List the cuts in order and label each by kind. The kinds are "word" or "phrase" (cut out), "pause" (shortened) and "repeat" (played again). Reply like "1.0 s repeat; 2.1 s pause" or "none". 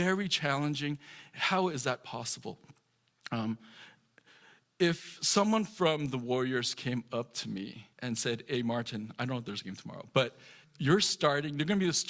7.9 s pause; 10.6 s pause